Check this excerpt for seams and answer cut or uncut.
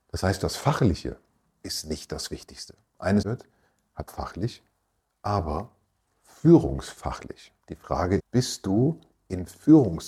cut